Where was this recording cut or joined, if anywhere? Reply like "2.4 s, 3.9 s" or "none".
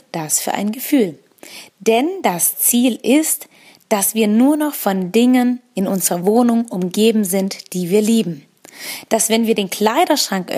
none